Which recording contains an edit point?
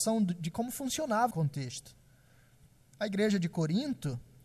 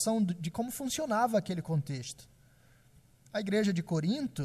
first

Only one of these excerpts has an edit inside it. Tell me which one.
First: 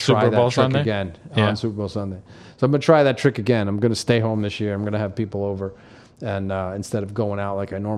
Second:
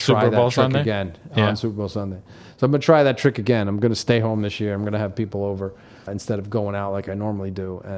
second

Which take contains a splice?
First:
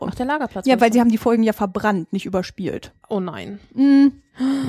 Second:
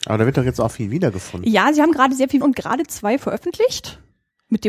second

